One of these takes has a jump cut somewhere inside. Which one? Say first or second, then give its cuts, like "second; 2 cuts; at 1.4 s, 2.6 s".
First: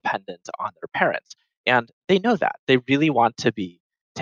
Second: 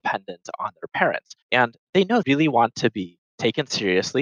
second; 3 cuts; at 1.4 s, 2.2 s, 3.3 s